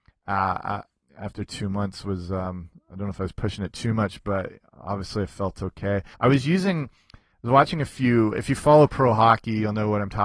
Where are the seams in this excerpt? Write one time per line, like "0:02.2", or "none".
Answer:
0:06.1